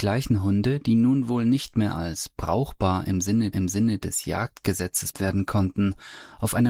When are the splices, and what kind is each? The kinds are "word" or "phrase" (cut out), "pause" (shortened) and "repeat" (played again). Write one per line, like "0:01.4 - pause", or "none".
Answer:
0:03.5 - repeat
0:05.1 - word